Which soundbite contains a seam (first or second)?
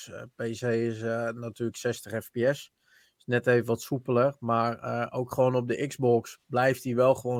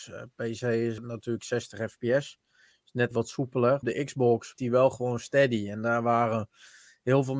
second